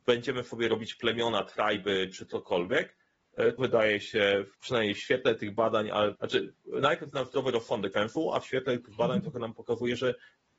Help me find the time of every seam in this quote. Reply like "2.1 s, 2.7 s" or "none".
3.6 s, 4.5 s, 6.2 s, 7.9 s